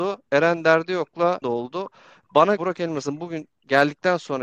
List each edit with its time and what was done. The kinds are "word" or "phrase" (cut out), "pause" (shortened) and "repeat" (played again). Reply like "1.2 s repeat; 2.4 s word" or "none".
1.4 s phrase; 2.6 s word